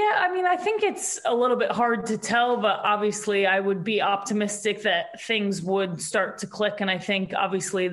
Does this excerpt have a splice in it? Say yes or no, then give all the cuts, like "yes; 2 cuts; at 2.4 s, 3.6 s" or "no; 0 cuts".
no; 0 cuts